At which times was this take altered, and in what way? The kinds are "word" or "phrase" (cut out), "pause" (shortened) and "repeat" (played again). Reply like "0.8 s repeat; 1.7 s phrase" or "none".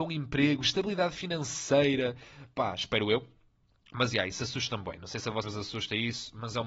5.4 s word